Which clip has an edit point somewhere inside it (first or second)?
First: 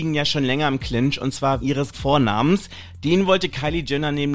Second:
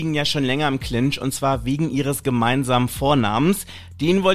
first